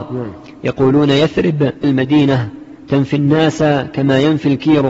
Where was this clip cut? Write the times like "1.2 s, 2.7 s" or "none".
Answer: 1.8 s